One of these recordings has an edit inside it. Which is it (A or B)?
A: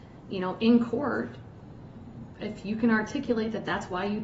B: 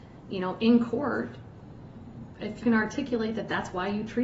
B